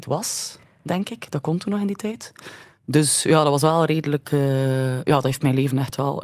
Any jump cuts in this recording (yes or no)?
yes